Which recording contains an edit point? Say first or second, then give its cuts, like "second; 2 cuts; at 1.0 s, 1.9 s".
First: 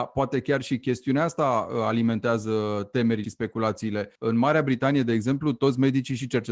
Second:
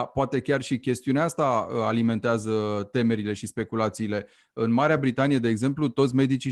first; 2 cuts; at 3.2 s, 4.2 s